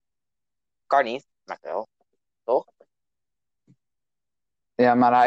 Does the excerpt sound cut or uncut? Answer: cut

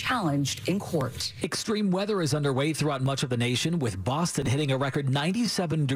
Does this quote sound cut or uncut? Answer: uncut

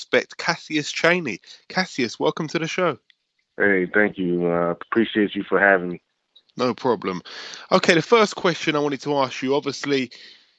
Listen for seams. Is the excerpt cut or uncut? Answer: uncut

